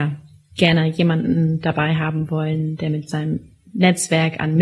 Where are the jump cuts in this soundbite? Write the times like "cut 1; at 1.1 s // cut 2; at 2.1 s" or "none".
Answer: none